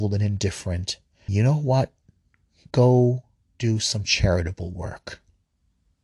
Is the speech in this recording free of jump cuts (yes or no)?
no